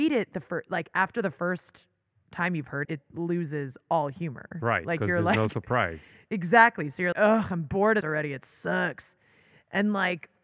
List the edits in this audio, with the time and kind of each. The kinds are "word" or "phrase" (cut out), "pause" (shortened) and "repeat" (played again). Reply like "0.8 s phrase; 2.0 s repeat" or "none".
2.8 s word; 7.1 s word; 8.0 s word